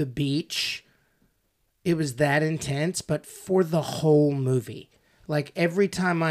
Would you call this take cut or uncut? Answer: uncut